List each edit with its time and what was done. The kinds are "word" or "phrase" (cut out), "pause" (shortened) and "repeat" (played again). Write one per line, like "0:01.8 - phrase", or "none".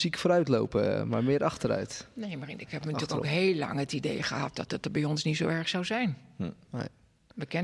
0:02.7 - word